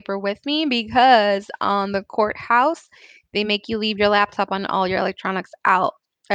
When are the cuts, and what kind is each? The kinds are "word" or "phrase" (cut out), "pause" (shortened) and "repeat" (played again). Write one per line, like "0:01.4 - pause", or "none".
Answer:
none